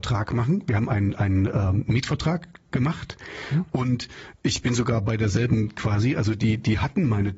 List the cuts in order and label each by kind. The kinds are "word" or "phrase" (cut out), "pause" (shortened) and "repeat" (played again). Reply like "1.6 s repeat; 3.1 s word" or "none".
5.8 s phrase